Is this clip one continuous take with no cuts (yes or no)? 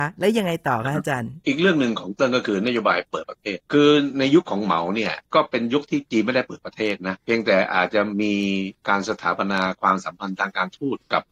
no